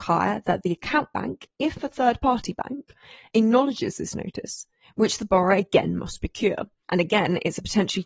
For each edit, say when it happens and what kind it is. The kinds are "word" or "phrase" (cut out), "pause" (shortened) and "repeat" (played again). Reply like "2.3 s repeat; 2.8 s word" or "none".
none